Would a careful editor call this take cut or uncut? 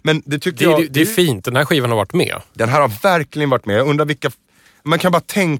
uncut